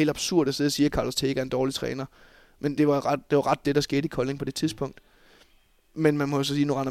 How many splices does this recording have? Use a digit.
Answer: 2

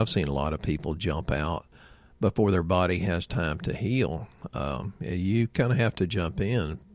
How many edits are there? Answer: 0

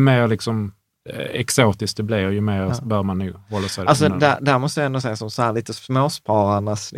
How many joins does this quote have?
0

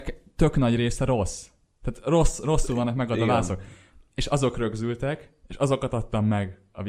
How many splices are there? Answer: 0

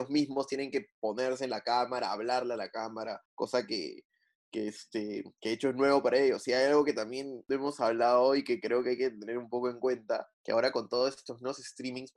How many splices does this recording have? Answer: 2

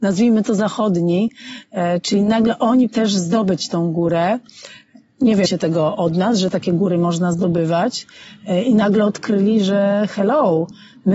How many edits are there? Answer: 2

